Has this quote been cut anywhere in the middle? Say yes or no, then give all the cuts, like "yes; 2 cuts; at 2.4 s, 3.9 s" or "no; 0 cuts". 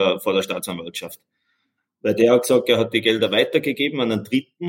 no; 0 cuts